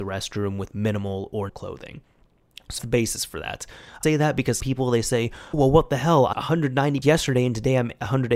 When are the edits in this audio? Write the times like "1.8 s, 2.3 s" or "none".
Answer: 1.5 s, 2.8 s, 4.0 s, 4.6 s, 5.5 s, 6.3 s, 7.0 s